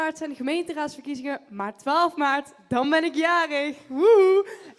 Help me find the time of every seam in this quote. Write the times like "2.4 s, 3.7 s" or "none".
none